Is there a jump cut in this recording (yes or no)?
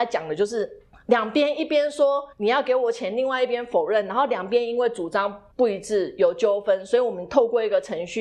yes